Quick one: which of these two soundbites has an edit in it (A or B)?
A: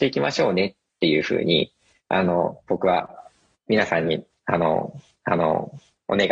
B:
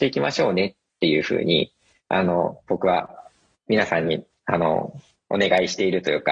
A